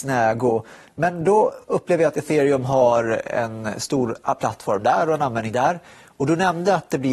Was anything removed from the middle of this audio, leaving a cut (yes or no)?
no